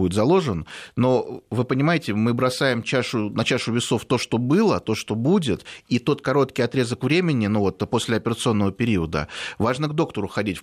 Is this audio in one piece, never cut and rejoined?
yes; 0 cuts

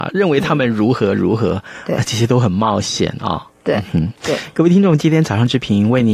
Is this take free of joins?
yes; 0 cuts

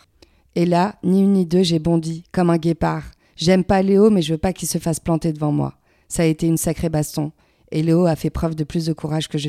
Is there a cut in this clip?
no; 0 cuts

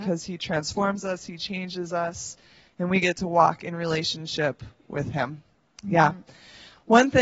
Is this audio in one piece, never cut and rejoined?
yes; 0 cuts

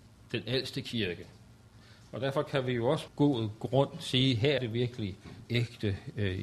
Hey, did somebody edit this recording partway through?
yes; 3 cuts; at 3.1 s, 4.6 s, 5.5 s

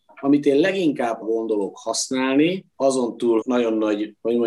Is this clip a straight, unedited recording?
no; 3 cuts; at 1.2 s, 2.7 s, 3.4 s

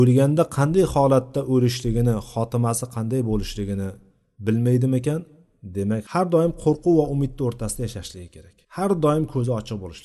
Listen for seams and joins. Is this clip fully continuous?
no; 1 cut; at 8.6 s

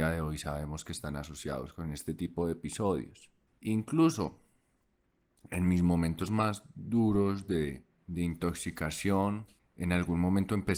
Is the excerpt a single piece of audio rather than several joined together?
no; 3 cuts; at 3.5 s, 7.9 s, 9.6 s

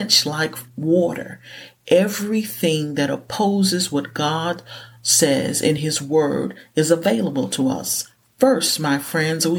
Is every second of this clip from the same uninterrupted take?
yes; 0 cuts

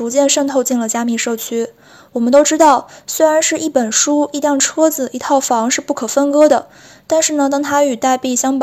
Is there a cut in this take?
no; 0 cuts

